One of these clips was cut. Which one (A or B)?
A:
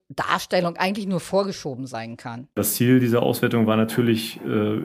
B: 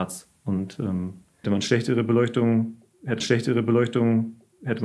B